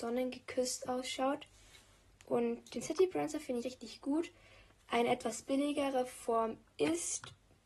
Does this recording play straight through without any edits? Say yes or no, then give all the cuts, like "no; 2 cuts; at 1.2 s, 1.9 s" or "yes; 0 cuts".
no; 1 cut; at 3.6 s